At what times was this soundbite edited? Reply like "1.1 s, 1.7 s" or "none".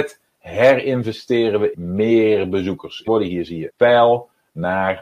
1.7 s, 3.1 s, 3.7 s